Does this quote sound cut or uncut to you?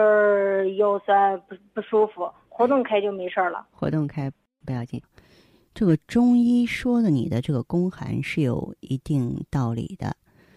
uncut